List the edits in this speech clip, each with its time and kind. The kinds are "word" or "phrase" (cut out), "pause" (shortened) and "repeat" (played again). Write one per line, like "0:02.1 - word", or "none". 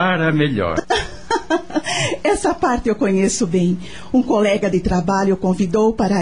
none